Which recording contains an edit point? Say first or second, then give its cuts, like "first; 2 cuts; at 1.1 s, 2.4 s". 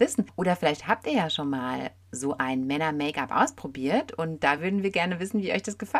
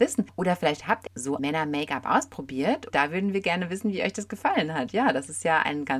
second; 3 cuts; at 1.1 s, 1.4 s, 2.9 s